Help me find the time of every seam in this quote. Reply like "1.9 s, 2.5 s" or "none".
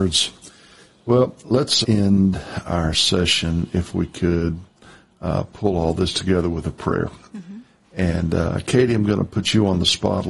1.8 s